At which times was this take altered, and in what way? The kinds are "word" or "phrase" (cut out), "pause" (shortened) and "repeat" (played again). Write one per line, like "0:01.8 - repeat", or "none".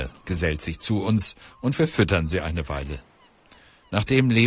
none